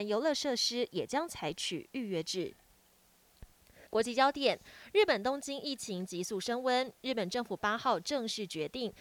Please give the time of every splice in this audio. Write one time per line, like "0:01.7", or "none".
0:03.9